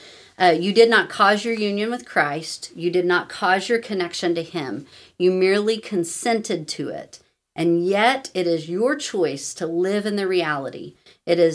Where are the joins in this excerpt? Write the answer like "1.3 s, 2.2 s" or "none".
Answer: none